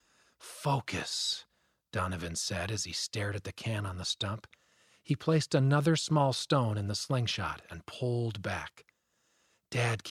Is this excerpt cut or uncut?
uncut